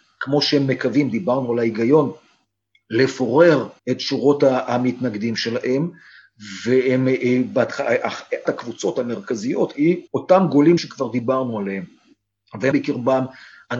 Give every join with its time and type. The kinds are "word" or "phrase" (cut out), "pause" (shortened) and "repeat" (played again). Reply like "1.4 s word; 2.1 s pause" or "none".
3.8 s pause; 8.4 s word; 10.1 s pause; 10.8 s word; 12.7 s word